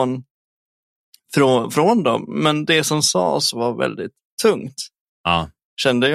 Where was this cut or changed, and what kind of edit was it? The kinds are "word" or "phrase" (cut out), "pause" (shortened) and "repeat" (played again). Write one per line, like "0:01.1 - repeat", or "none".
none